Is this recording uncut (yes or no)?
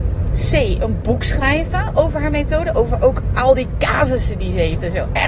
yes